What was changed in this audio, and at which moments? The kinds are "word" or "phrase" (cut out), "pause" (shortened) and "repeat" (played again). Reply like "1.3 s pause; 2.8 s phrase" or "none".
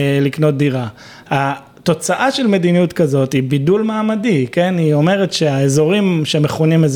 none